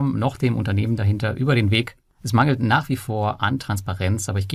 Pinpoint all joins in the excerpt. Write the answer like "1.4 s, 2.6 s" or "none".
none